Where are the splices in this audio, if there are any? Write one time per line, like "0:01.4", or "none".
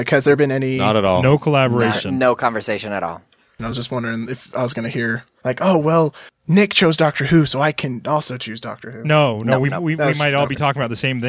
none